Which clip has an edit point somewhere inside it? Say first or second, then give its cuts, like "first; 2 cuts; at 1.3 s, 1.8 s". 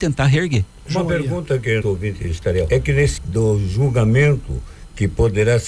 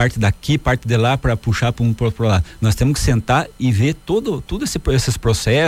first; 3 cuts; at 1.8 s, 2.7 s, 3.2 s